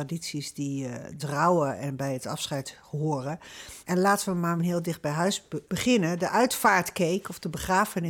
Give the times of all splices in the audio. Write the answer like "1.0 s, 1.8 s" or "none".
1.2 s, 3.8 s, 4.6 s, 5.7 s